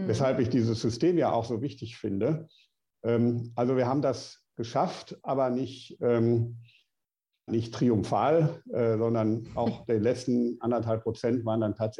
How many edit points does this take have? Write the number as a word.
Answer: one